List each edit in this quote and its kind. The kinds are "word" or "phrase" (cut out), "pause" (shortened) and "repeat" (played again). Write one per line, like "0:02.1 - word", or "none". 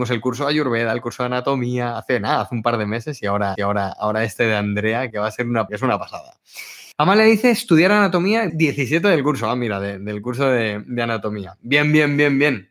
0:03.6 - repeat
0:05.1 - word
0:05.7 - word
0:06.9 - pause
0:08.5 - phrase